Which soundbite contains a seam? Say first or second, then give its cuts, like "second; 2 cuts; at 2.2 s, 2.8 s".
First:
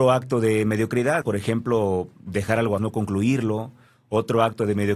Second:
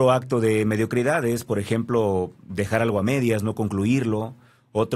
first; 2 cuts; at 1.2 s, 2.8 s